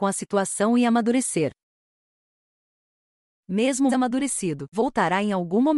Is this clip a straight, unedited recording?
no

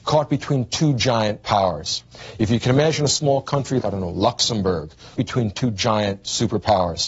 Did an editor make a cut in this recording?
yes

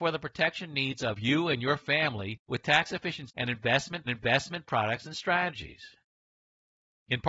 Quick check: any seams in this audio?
yes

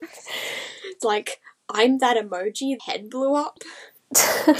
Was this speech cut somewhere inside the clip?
yes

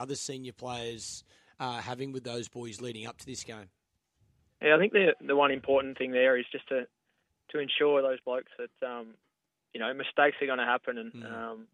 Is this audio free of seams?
yes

